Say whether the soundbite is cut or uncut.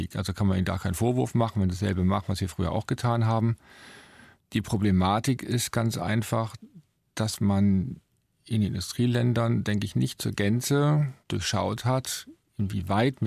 cut